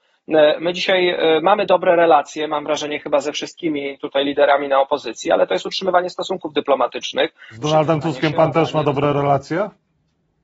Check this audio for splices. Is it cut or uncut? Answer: uncut